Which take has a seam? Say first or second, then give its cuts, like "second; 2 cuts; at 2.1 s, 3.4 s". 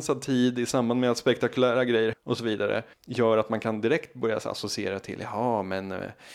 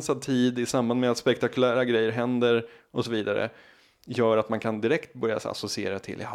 first; 2 cuts; at 2.1 s, 2.9 s